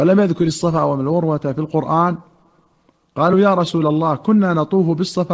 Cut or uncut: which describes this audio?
uncut